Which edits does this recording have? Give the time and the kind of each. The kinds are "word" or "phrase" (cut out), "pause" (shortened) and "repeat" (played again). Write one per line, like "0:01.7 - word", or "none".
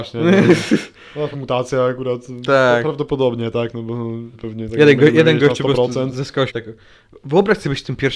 0:01.3 - word
0:04.3 - word
0:06.5 - word